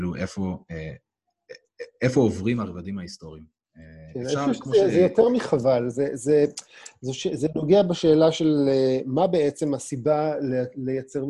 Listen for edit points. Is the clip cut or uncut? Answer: uncut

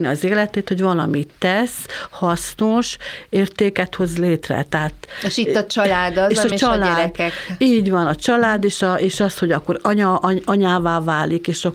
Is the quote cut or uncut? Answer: uncut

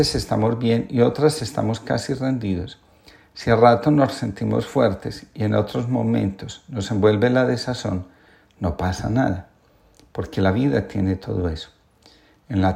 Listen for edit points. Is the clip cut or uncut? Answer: uncut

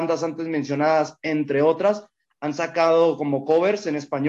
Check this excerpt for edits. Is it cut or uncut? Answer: uncut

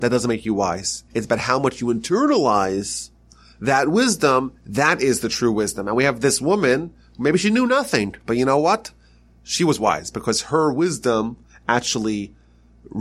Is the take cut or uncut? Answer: cut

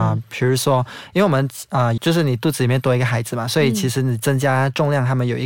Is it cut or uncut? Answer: cut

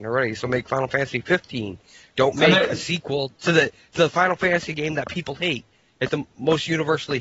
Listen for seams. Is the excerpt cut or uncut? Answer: cut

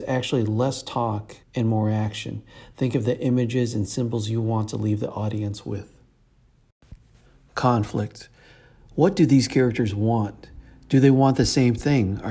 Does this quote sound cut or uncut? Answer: cut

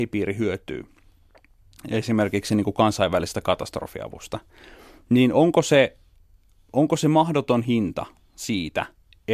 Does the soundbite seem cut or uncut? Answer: uncut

